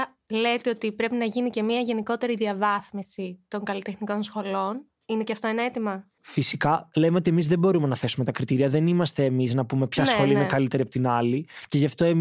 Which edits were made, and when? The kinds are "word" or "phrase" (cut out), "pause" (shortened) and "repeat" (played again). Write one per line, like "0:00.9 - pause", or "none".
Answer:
0:06.2 - pause